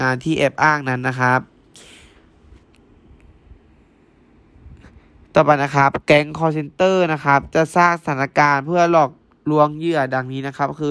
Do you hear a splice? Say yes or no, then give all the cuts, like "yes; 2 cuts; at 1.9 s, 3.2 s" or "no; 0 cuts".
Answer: no; 0 cuts